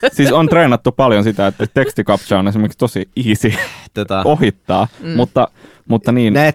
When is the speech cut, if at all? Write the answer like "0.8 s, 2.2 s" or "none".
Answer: none